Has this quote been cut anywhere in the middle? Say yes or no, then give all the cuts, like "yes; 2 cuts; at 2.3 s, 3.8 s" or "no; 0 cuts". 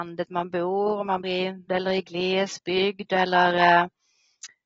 yes; 2 cuts; at 1.2 s, 1.7 s